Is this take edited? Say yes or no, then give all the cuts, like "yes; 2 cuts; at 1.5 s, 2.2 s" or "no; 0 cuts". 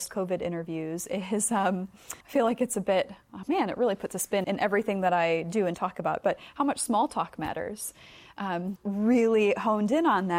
yes; 4 cuts; at 2.2 s, 3.4 s, 4.4 s, 8.8 s